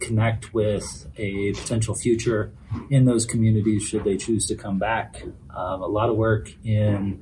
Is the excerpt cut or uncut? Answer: uncut